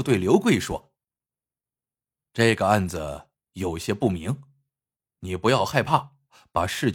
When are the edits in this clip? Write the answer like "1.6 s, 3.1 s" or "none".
none